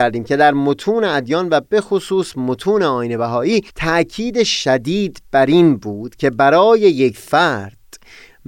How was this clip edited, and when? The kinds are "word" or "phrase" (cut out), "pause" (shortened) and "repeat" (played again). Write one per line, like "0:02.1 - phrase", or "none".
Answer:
0:03.7 - pause